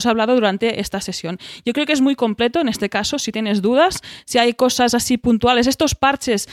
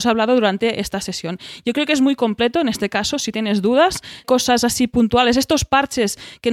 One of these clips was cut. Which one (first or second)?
second